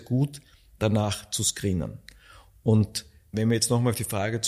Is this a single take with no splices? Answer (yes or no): no